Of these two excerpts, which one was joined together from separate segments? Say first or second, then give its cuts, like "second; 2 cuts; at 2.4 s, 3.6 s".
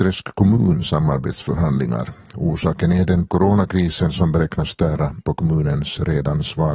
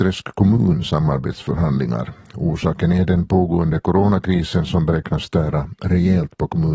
first; 2 cuts; at 3.3 s, 5.2 s